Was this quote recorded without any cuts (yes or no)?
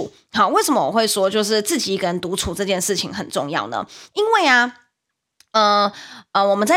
yes